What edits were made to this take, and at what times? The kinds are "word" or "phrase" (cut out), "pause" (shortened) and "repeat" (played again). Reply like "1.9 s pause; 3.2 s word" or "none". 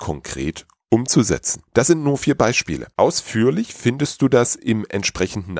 1.7 s pause; 2.9 s pause